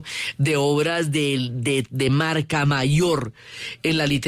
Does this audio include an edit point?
no; 0 cuts

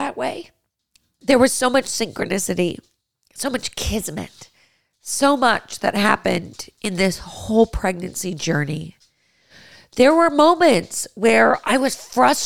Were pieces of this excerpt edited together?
no; 0 cuts

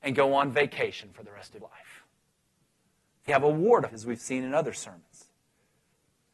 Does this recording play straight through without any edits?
no; 3 cuts; at 1.6 s, 3.3 s, 3.9 s

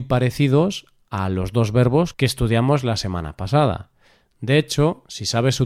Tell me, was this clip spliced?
no; 0 cuts

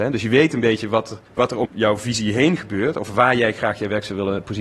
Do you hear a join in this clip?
yes; 2 cuts; at 1.3 s, 1.6 s

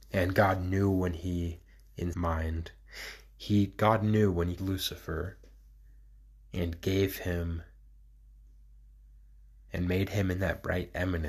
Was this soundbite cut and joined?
yes; 2 cuts; at 2.1 s, 4.6 s

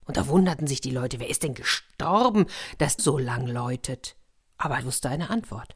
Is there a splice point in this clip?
yes; 2 cuts; at 3.0 s, 4.8 s

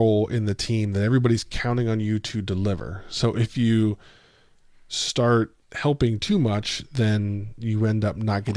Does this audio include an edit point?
yes; 1 cut; at 5.6 s

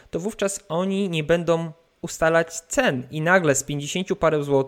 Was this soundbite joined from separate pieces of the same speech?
no; 0 cuts

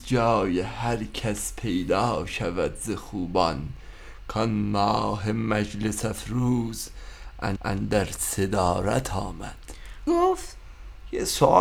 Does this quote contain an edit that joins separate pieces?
yes; 2 cuts; at 7.6 s, 10.1 s

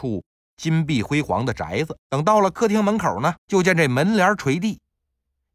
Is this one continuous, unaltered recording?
no; 2 cuts; at 2.0 s, 3.4 s

